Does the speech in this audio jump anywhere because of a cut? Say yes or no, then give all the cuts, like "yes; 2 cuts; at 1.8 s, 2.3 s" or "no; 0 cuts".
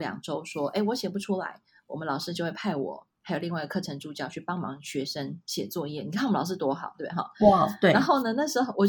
yes; 1 cut; at 3.1 s